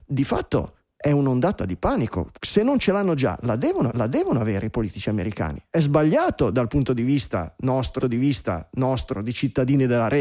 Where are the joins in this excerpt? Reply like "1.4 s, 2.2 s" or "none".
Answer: 2.4 s, 3.9 s, 8.0 s